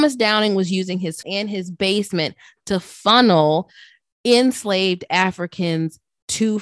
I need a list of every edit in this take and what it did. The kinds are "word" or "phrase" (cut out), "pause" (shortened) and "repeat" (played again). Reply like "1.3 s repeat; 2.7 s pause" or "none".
1.2 s word